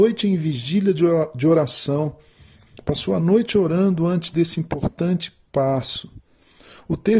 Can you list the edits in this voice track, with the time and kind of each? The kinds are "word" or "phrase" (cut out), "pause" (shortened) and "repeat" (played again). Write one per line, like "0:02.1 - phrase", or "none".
none